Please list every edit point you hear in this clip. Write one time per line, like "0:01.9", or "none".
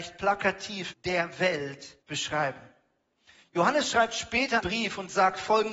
0:00.9
0:02.0
0:04.6